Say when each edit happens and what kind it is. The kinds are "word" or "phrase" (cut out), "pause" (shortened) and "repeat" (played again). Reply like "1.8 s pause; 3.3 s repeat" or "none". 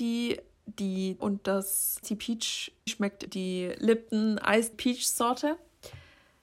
1.2 s word; 2.0 s word; 2.9 s word; 3.3 s word; 4.7 s word